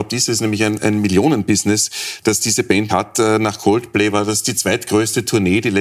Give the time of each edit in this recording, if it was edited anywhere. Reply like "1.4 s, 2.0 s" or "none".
2.9 s